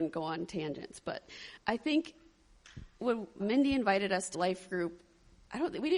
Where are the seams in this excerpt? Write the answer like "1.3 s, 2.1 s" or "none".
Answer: 1.6 s, 3.0 s, 3.4 s, 4.3 s